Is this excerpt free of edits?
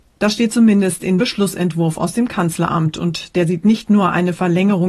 no; 1 cut; at 1.2 s

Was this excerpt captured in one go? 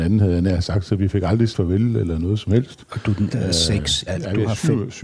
no; 3 cuts; at 1.5 s, 3.3 s, 4.1 s

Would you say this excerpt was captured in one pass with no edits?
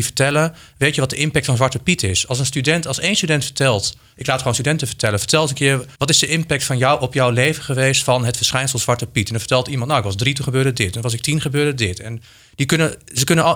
no; 1 cut; at 5.9 s

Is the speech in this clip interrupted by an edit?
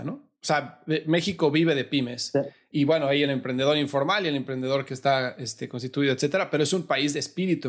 no; 0 cuts

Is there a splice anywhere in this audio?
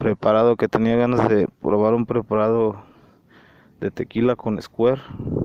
no; 0 cuts

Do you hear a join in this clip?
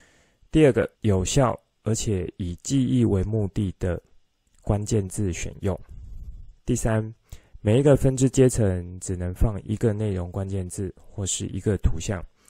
yes; 1 cut; at 1.0 s

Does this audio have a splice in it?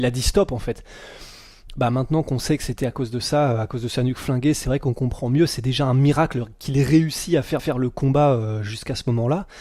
yes; 1 cut; at 7.6 s

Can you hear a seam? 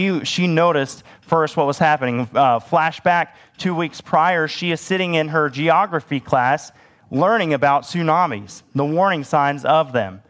no; 0 cuts

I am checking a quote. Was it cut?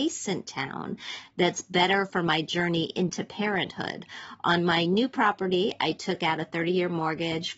no; 0 cuts

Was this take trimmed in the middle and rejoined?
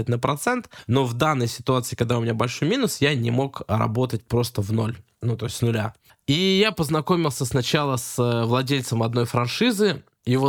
no; 0 cuts

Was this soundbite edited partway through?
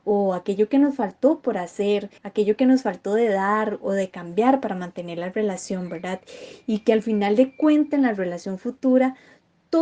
yes; 1 cut; at 2.2 s

